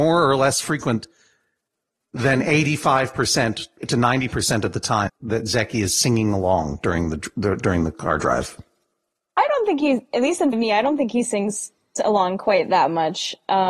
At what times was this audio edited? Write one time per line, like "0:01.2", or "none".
0:03.8
0:05.1
0:10.5